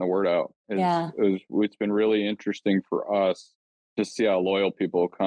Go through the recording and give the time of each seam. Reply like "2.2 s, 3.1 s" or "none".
none